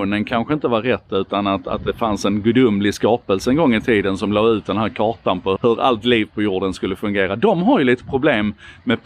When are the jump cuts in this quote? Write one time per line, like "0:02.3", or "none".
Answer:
0:05.6